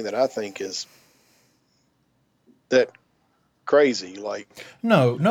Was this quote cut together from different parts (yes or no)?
no